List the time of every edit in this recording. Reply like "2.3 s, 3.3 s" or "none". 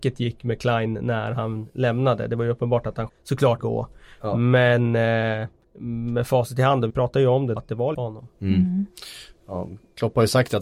3.1 s, 3.6 s, 5.6 s, 6.9 s, 7.6 s, 7.9 s